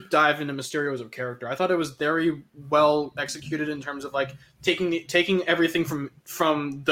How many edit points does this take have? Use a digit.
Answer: 0